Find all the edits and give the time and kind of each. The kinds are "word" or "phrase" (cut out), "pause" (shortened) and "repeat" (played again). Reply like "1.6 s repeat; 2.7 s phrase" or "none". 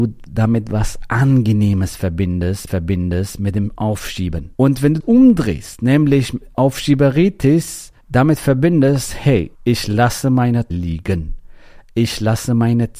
2.7 s repeat; 4.6 s pause; 5.0 s word; 8.0 s pause; 9.6 s pause; 10.7 s word